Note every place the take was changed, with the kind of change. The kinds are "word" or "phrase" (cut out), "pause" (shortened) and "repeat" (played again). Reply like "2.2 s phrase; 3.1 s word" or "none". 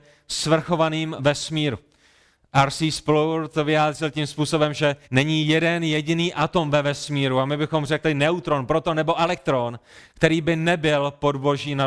1.2 s word; 5.0 s pause

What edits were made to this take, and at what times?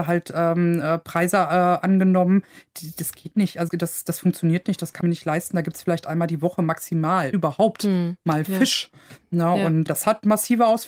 3.7 s word; 5.0 s word; 7.3 s word; 9.9 s word

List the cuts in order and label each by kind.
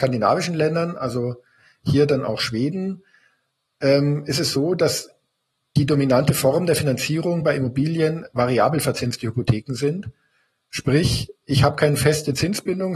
none

